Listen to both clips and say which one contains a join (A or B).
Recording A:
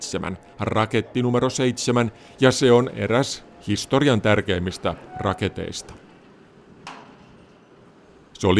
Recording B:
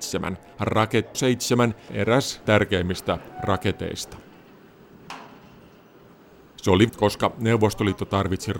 B